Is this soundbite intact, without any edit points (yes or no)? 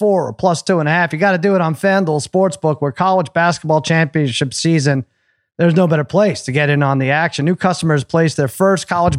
yes